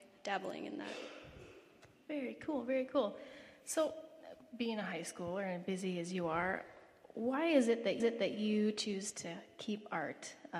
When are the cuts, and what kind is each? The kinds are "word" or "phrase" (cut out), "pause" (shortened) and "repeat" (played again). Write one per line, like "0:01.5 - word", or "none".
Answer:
0:08.0 - repeat